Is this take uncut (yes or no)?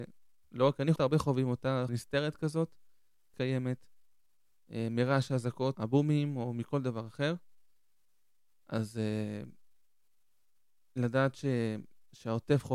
no